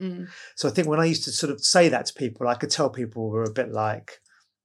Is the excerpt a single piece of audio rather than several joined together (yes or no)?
yes